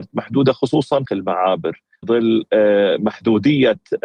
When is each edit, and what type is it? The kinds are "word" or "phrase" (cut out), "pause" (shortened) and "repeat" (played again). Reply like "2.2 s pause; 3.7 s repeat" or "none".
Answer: 1.1 s phrase; 2.0 s word